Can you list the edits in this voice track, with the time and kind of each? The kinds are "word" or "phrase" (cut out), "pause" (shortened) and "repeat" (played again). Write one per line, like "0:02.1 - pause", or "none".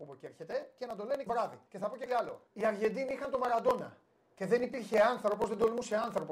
0:01.3 - word
0:01.7 - pause
0:02.1 - word
0:02.5 - pause
0:04.1 - pause